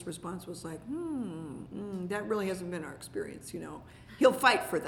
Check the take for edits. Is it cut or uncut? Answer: uncut